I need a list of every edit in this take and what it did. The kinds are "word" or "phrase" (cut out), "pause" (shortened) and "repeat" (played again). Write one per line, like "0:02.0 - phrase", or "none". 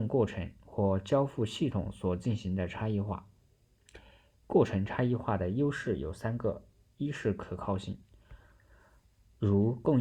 none